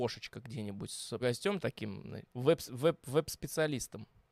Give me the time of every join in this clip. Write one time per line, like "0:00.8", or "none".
0:01.2
0:01.6
0:02.3